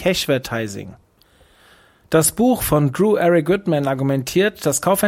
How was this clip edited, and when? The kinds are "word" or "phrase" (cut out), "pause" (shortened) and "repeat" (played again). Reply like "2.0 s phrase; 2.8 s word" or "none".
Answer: none